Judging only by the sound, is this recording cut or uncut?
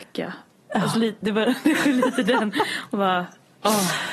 uncut